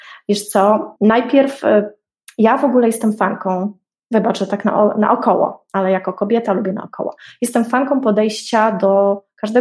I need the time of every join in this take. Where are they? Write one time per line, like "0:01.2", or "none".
0:01.0

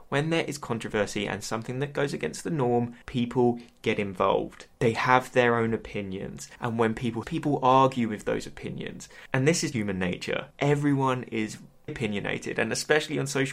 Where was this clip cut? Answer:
0:03.0
0:04.7
0:07.2
0:09.7
0:10.5
0:11.9

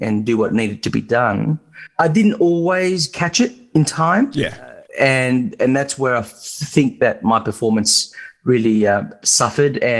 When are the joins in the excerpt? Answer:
0:04.9

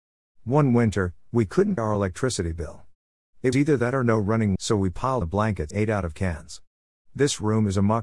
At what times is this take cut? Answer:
0:01.8
0:03.5
0:04.6
0:05.2
0:05.7

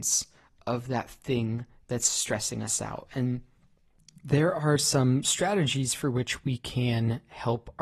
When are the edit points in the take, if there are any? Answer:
none

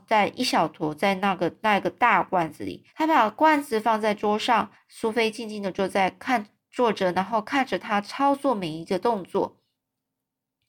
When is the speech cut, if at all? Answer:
0:02.9
0:04.7

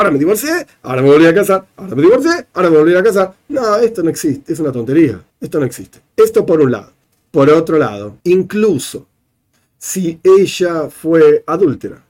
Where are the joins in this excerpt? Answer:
0:05.3
0:06.1
0:07.0
0:08.2

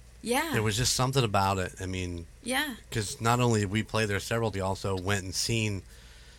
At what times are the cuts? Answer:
0:04.5

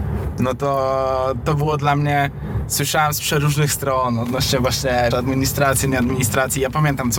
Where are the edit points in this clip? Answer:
0:05.1

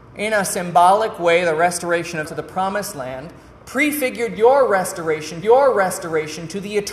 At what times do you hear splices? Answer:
0:02.2
0:05.4

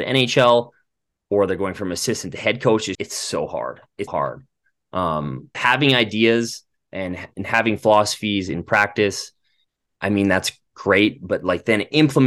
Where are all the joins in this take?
0:02.9
0:04.1
0:05.5
0:07.3

